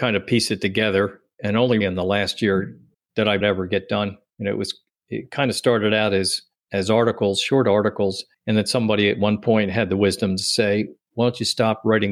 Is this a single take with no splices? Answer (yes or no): no